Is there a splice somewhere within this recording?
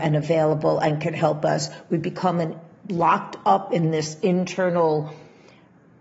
no; 0 cuts

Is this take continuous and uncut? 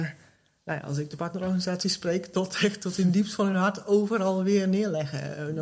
yes; 0 cuts

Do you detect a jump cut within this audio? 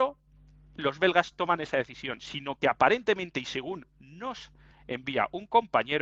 no; 0 cuts

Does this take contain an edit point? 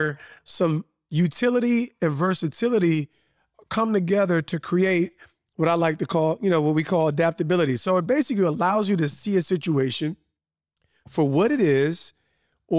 no; 0 cuts

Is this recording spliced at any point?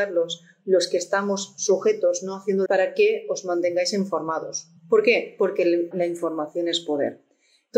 yes; 3 cuts; at 2.7 s, 4.8 s, 5.9 s

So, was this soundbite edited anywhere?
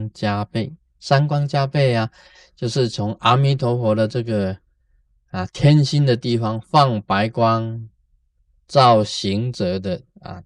no; 0 cuts

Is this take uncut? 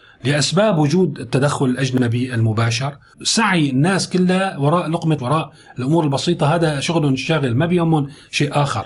no; 2 cuts; at 3.1 s, 5.2 s

